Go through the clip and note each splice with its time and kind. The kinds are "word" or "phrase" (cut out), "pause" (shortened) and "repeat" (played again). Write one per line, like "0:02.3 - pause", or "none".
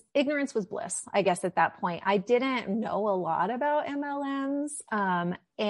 none